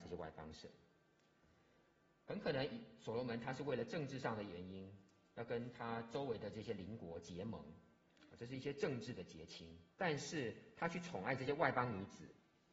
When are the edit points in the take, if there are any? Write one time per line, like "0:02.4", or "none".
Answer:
0:09.9